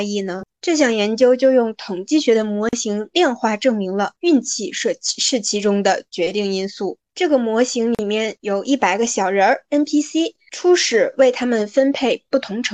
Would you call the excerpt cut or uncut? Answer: uncut